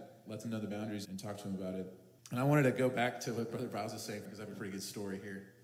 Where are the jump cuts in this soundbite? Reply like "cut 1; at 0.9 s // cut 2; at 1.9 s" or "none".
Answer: cut 1; at 1.0 s // cut 2; at 2.2 s // cut 3; at 4.2 s